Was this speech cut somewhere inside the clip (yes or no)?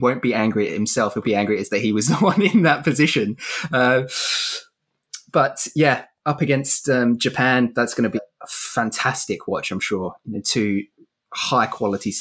yes